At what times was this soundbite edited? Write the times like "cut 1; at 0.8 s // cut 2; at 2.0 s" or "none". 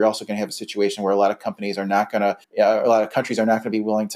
cut 1; at 2.4 s